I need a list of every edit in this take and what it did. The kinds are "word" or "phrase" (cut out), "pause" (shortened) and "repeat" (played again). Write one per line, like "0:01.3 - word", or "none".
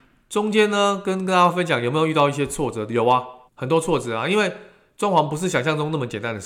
0:03.5 - pause